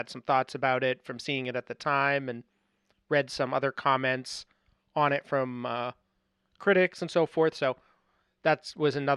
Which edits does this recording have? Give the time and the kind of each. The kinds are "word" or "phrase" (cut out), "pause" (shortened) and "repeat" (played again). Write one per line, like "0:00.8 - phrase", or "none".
none